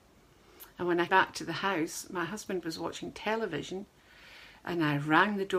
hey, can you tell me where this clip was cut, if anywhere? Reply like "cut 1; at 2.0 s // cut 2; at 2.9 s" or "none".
cut 1; at 1.1 s